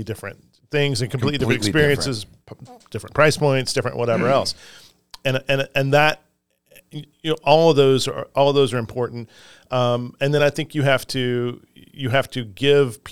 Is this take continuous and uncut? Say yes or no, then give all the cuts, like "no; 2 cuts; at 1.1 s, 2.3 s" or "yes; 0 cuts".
yes; 0 cuts